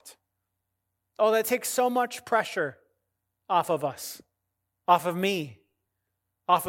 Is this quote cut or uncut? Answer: uncut